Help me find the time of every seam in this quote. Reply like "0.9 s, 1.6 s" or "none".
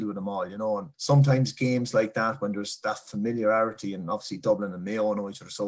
0.9 s